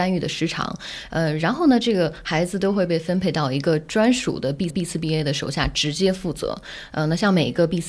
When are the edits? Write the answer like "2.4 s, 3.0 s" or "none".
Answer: 4.7 s

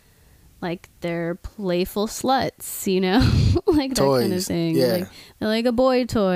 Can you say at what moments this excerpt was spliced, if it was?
none

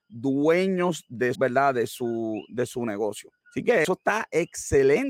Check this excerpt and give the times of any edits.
1.3 s, 3.4 s, 3.8 s

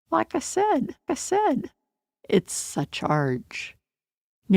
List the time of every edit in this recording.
1.1 s

